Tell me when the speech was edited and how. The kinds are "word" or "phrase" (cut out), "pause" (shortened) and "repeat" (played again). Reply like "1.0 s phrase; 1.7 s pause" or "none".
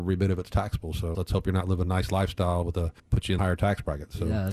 1.1 s word; 1.8 s word; 3.0 s pause; 3.4 s word

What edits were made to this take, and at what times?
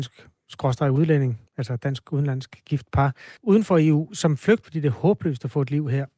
1.5 s pause; 3.4 s pause; 4.6 s phrase

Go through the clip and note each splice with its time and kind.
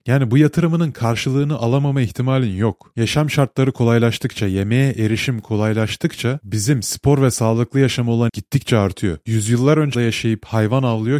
8.3 s word; 9.9 s word

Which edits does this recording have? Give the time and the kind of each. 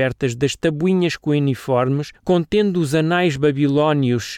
none

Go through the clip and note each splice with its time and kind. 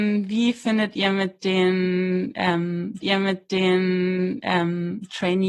3.0 s repeat

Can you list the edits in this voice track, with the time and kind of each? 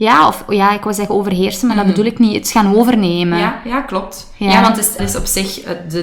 5.0 s phrase

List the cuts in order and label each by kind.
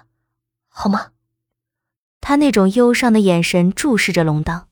none

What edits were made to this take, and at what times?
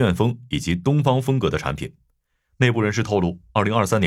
none

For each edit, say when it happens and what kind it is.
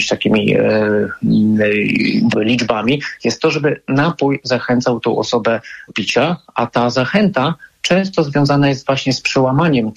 2.3 s phrase; 5.9 s word

